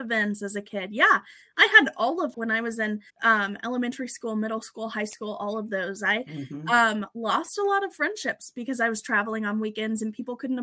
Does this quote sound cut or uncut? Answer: cut